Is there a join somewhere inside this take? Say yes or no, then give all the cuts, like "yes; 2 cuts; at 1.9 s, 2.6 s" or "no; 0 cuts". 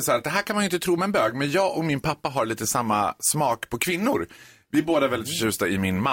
no; 0 cuts